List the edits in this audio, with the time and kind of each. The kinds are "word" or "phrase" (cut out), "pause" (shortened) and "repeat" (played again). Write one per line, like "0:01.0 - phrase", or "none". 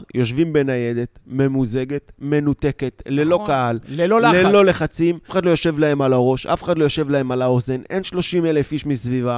0:05.3 - word